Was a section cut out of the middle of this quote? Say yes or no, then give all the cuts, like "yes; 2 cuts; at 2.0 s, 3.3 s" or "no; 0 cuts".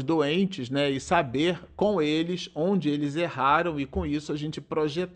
no; 0 cuts